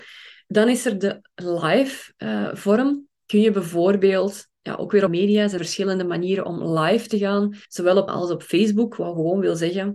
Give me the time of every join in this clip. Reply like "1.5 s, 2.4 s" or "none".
3.2 s, 5.1 s, 5.6 s, 7.6 s, 8.1 s